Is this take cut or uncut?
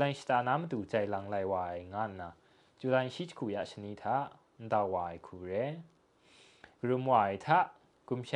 uncut